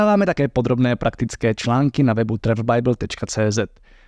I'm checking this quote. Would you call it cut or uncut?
uncut